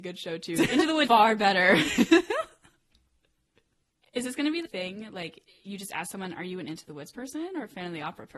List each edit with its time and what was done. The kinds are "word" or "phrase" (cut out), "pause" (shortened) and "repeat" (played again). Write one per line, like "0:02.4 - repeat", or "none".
0:01.1 - word
0:04.6 - word